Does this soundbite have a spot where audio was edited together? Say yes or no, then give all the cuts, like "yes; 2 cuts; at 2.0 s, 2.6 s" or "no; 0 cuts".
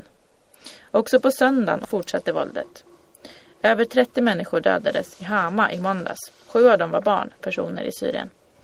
yes; 2 cuts; at 1.8 s, 7.4 s